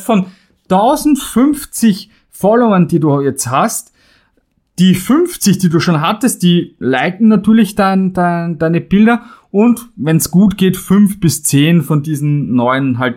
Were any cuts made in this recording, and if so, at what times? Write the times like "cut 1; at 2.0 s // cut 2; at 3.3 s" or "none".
none

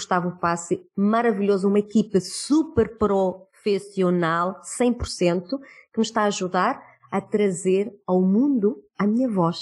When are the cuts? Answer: none

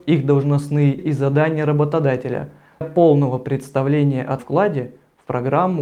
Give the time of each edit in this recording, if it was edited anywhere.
cut 1; at 1.0 s // cut 2; at 2.8 s // cut 3; at 4.4 s

